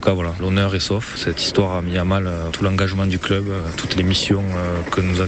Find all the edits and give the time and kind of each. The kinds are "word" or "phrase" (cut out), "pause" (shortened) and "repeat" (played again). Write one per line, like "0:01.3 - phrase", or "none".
0:02.5 - word

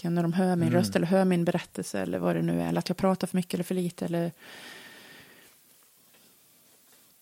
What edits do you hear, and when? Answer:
none

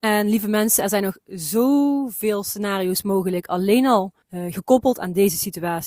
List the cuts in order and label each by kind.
0:04.2 - pause

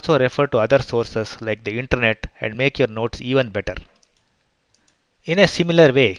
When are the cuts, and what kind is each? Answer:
none

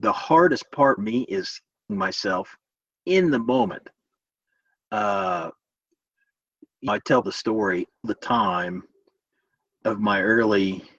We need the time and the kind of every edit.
0:01.0 - word
0:01.9 - word
0:06.9 - word
0:07.2 - word
0:08.0 - word
0:09.8 - word

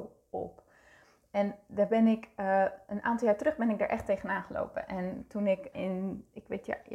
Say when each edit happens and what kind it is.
0:05.7 - word

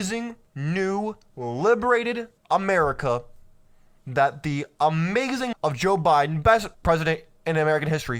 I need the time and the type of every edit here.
0:02.4 - pause
0:05.5 - word
0:06.7 - pause

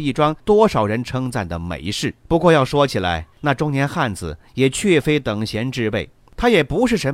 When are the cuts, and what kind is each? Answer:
0:02.2 - pause
0:03.3 - pause

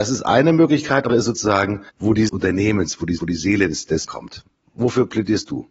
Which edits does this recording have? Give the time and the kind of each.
0:01.1 - phrase
0:01.9 - pause
0:02.3 - phrase
0:03.2 - repeat
0:04.1 - phrase

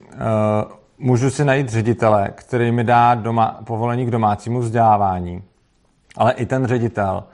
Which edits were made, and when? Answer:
none

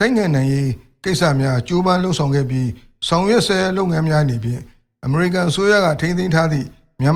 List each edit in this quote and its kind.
none

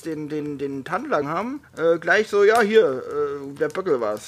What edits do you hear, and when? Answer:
0:01.2 - word
0:01.6 - pause

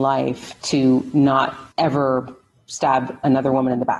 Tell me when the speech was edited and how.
0:01.7 - pause

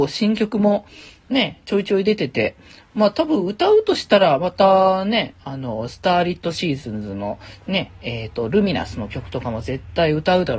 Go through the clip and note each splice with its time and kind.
none

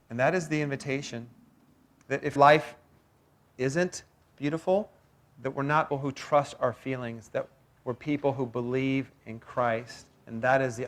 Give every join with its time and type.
0:02.4 - word
0:04.3 - word
0:05.9 - word

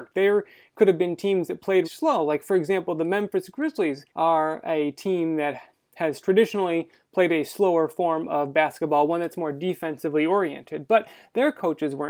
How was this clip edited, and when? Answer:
0:01.8 - word
0:04.1 - pause

